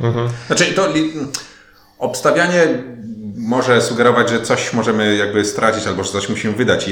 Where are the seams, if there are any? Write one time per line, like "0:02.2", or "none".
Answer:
none